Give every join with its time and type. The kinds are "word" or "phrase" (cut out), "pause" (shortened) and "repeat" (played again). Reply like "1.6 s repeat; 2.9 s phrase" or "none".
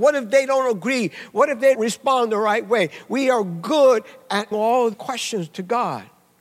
1.7 s word; 4.5 s word; 4.9 s word